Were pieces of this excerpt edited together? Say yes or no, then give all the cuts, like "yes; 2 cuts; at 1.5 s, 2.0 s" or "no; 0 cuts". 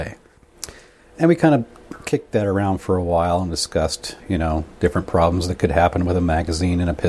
yes; 1 cut; at 4.2 s